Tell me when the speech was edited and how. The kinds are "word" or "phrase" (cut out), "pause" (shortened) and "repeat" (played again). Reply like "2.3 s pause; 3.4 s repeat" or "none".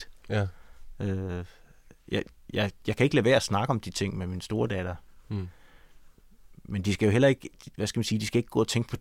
none